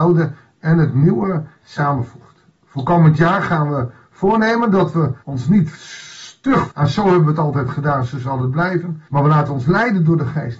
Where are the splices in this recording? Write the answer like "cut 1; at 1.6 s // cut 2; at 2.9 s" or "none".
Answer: cut 1; at 2.5 s // cut 2; at 5.2 s // cut 3; at 6.7 s // cut 4; at 9.1 s